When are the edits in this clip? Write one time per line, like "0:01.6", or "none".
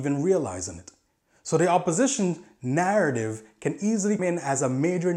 0:04.2